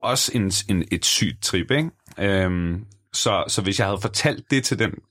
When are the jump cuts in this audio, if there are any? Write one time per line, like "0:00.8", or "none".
none